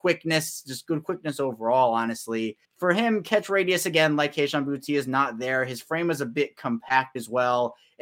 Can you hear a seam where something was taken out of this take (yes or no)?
yes